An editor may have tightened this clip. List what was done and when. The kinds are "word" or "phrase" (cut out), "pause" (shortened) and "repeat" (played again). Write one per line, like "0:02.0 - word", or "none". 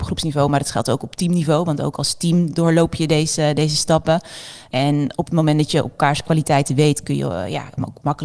none